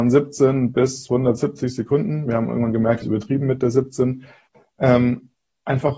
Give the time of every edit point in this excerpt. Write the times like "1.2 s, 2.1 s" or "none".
3.0 s